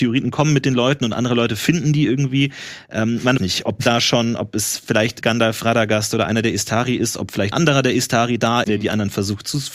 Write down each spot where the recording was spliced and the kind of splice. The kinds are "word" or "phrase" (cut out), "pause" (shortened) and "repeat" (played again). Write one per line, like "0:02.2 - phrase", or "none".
0:03.4 - phrase
0:05.2 - word
0:07.5 - word
0:08.6 - word